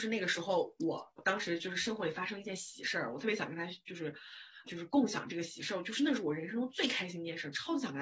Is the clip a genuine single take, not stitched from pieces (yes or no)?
no